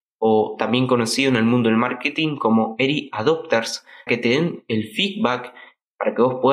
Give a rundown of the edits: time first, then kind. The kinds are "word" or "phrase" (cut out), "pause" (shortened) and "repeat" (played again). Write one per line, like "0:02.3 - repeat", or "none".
0:04.1 - word